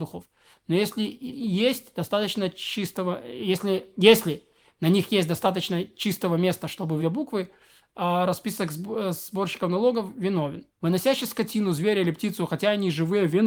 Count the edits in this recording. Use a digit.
3